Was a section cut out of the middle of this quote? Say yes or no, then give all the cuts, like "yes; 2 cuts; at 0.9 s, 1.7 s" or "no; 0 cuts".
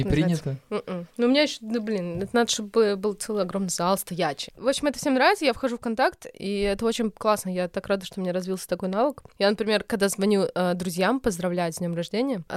yes; 1 cut; at 1.1 s